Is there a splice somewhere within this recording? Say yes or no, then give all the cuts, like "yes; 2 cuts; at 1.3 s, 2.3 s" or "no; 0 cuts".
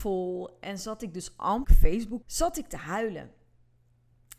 yes; 2 cuts; at 1.6 s, 2.2 s